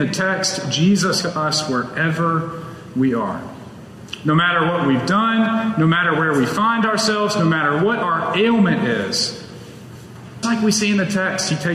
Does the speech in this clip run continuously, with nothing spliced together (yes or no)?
no